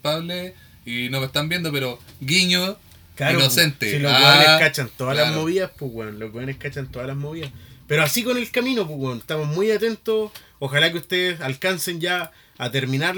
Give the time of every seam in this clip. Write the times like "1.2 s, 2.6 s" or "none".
none